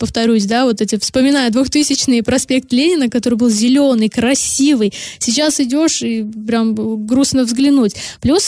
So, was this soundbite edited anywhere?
no; 0 cuts

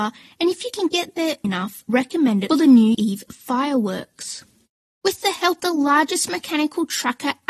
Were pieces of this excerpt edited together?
yes; 5 cuts; at 1.4 s, 1.9 s, 2.5 s, 2.9 s, 5.6 s

